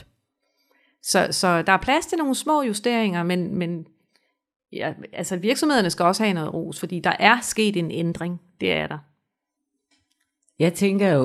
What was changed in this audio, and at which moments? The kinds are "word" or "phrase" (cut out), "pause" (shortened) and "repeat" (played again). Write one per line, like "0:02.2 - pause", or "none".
none

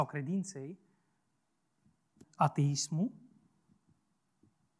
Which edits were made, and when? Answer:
0:02.2 - word

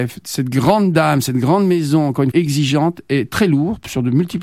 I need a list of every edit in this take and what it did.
0:02.3 - word

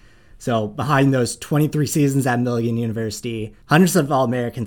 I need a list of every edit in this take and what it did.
0:03.6 - pause

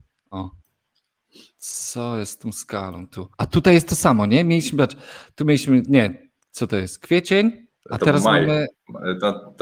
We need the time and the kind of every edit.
0:03.3 - pause
0:07.7 - pause

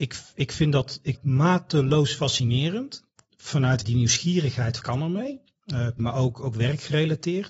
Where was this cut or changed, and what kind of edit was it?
0:01.1 - word
0:03.8 - word
0:04.8 - word
0:06.0 - word

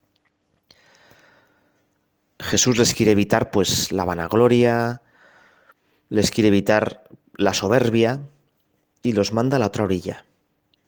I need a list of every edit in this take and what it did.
none

